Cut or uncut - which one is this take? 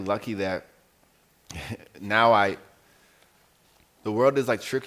uncut